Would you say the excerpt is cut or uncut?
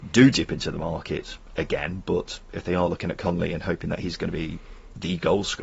uncut